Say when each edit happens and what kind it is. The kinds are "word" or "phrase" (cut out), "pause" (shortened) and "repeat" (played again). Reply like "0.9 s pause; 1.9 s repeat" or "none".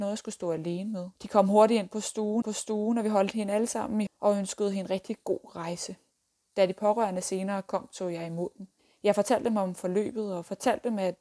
1.2 s pause; 2.4 s repeat; 4.1 s word; 6.1 s pause; 8.8 s pause